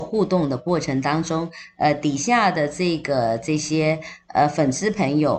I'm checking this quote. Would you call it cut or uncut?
uncut